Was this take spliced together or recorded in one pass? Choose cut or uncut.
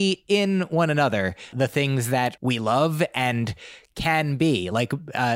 cut